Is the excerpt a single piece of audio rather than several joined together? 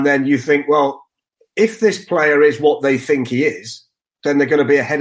yes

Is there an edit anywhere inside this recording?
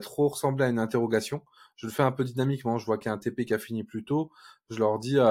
no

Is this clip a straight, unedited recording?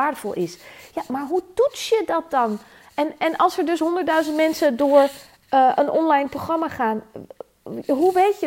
yes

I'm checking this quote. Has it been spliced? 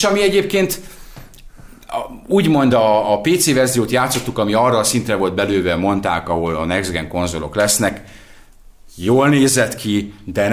no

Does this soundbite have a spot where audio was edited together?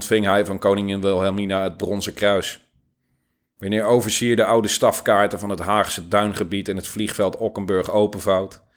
no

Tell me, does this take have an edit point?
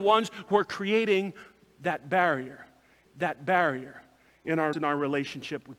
yes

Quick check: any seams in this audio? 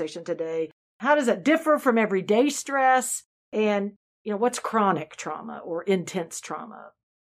no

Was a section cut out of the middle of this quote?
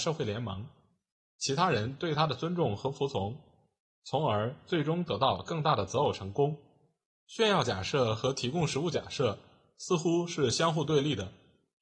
no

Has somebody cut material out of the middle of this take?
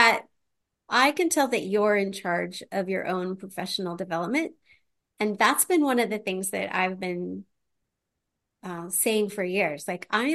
no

